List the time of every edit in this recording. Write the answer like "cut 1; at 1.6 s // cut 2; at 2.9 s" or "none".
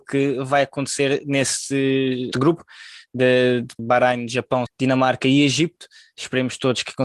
cut 1; at 2.3 s // cut 2; at 3.8 s // cut 3; at 4.7 s